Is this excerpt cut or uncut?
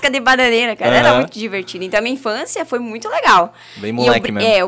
uncut